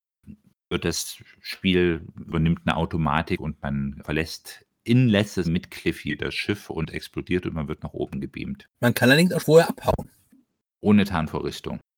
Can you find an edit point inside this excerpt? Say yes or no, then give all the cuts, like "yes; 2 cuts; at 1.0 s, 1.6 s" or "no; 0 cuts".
yes; 6 cuts; at 2.1 s, 4.0 s, 5.4 s, 6.9 s, 8.7 s, 9.4 s